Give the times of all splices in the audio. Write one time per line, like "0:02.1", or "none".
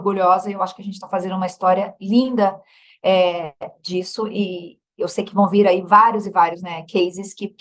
none